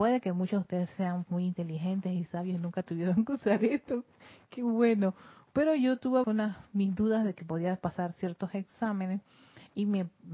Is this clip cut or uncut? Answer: cut